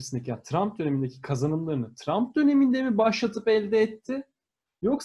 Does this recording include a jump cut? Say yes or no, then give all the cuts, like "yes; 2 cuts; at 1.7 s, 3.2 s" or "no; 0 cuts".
no; 0 cuts